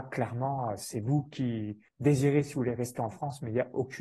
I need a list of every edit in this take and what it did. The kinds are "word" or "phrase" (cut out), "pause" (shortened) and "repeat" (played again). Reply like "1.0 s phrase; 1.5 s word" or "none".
1.9 s pause